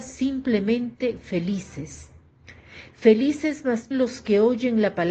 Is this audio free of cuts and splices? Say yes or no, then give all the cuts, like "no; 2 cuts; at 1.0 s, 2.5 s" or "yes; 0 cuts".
no; 1 cut; at 3.9 s